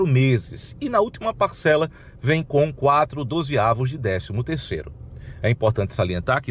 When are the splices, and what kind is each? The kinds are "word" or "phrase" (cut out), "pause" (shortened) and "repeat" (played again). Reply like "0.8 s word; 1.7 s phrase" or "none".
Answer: none